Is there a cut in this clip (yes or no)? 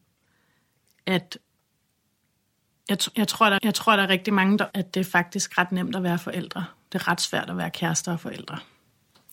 yes